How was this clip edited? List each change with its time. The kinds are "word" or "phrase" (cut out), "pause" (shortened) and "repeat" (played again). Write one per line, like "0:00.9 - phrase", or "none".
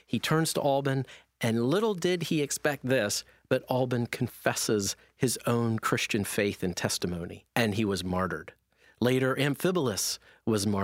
0:07.5 - pause